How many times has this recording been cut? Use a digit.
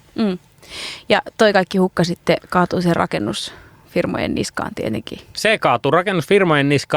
0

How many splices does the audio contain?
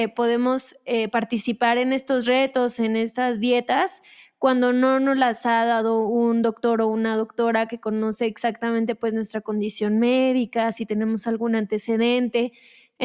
0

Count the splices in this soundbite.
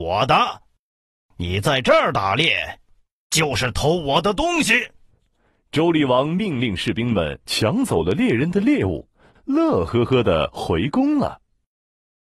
0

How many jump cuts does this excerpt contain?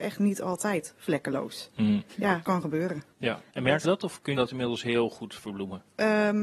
4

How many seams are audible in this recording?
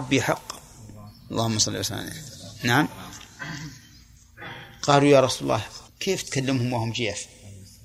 1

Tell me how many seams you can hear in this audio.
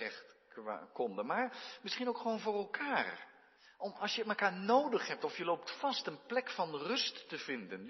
1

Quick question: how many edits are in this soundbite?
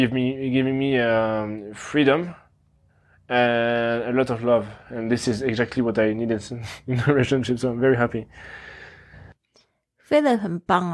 0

